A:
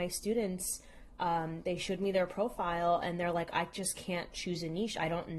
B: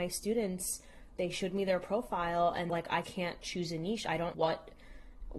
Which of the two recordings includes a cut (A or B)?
B